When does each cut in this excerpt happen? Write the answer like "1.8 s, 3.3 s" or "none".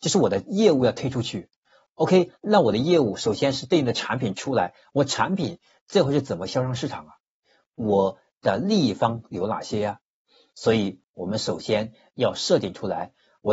none